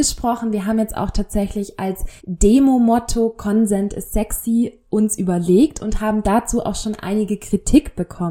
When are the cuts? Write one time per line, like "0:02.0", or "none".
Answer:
0:02.2

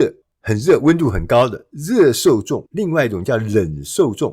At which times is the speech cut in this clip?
0:02.7

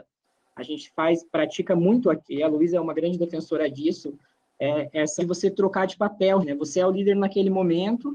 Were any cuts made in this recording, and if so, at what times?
0:02.3
0:05.2
0:06.4

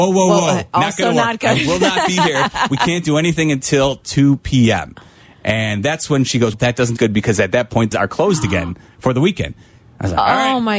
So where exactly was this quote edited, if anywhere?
0:06.5
0:07.0
0:07.9

